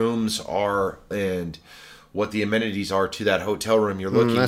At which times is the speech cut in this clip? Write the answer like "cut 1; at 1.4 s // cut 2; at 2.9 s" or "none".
cut 1; at 1.1 s